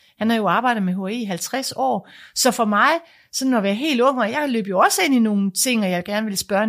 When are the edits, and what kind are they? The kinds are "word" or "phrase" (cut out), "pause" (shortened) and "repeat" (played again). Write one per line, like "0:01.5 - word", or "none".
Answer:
none